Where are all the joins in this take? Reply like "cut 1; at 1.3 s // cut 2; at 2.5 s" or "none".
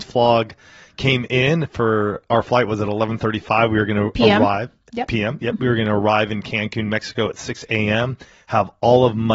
none